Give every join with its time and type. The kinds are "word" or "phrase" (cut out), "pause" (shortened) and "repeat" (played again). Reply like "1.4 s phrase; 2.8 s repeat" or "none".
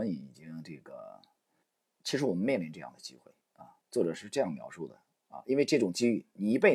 1.6 s pause; 3.4 s pause